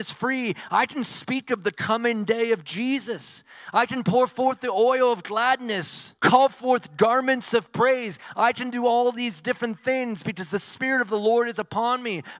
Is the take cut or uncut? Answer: cut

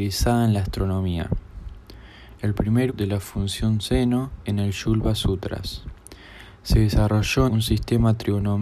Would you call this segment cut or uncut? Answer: cut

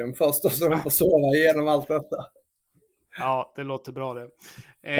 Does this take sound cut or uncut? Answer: uncut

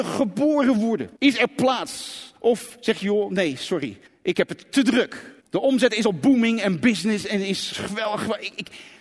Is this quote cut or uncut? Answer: cut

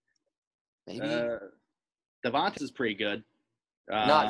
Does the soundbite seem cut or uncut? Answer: cut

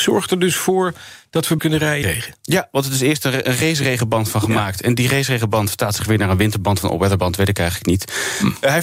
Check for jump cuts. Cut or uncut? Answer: cut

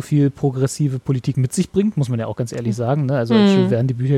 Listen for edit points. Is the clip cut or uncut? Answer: uncut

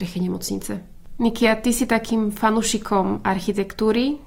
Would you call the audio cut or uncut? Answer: uncut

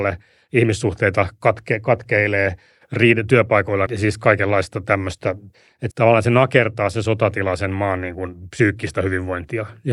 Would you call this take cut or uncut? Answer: cut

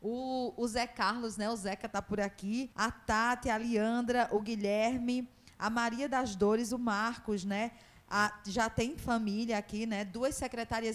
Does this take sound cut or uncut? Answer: cut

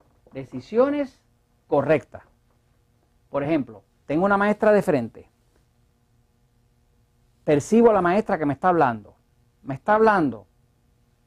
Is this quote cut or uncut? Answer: uncut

